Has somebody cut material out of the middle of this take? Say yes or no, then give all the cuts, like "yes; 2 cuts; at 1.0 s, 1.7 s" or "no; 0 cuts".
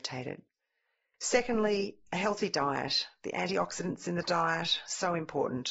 no; 0 cuts